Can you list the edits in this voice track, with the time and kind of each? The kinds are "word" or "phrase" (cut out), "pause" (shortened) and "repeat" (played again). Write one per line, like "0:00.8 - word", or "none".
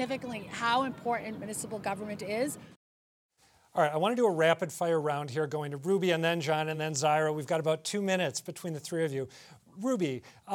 none